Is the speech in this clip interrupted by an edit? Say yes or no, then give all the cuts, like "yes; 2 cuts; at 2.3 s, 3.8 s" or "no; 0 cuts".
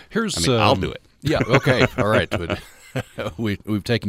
no; 0 cuts